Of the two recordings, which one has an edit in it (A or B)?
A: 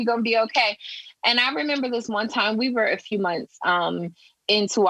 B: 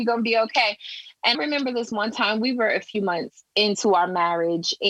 B